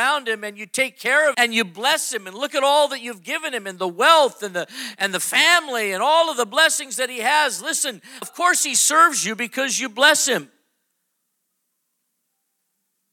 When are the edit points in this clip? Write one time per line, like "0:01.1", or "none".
0:01.3
0:08.2